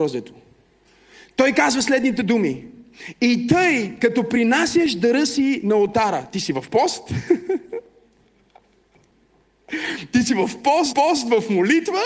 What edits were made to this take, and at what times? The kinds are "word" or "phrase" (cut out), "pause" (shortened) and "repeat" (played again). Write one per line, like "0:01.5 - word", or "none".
0:10.9 - repeat